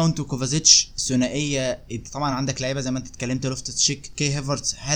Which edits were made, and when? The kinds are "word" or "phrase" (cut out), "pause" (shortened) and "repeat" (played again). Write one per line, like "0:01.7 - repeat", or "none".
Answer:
none